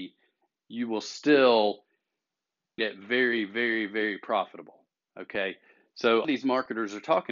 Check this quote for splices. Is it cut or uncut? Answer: cut